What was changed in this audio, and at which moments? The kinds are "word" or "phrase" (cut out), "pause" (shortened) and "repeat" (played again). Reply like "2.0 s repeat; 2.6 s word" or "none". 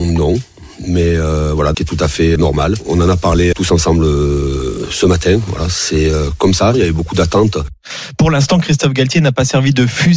1.7 s phrase; 2.4 s word; 3.5 s word